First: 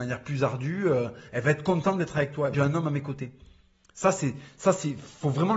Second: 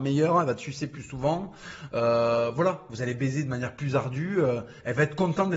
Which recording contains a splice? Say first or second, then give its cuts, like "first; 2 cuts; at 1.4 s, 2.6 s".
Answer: first; 1 cut; at 2.5 s